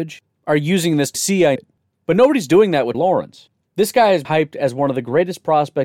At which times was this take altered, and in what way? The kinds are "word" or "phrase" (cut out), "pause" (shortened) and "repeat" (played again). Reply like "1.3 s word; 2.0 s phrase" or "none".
1.1 s word; 1.6 s word; 2.9 s word; 4.2 s word